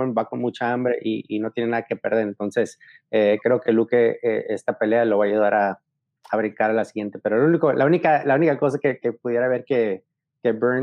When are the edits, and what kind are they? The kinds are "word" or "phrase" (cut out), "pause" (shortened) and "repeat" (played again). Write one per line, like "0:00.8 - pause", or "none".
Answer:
none